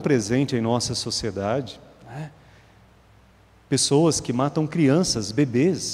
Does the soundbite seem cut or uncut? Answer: uncut